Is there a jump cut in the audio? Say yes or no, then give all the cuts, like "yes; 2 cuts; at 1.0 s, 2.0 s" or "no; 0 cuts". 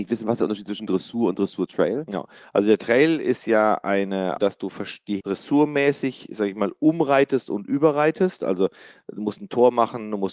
yes; 2 cuts; at 4.4 s, 5.2 s